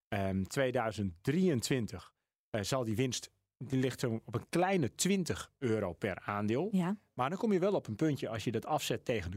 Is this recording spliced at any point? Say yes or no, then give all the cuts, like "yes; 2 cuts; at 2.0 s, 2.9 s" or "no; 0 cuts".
no; 0 cuts